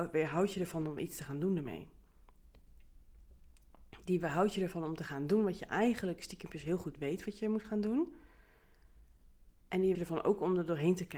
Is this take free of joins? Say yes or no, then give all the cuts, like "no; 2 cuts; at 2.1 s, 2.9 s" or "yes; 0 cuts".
no; 2 cuts; at 9.6 s, 9.9 s